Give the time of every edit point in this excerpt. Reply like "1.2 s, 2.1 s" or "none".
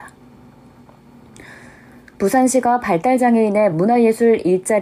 none